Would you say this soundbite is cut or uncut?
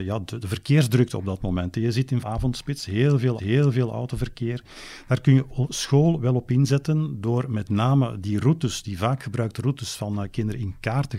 cut